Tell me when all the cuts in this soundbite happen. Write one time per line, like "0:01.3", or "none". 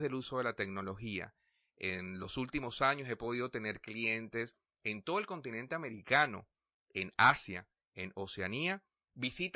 none